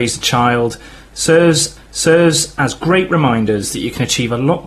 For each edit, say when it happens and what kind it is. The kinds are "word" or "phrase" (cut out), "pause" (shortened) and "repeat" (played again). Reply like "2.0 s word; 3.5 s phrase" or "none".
1.8 s repeat